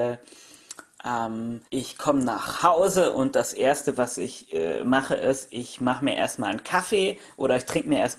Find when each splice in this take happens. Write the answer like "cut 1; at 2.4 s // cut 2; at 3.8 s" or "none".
cut 1; at 1.7 s